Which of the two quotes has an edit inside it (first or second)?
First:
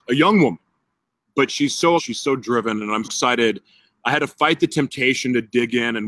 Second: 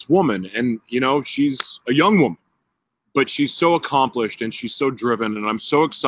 first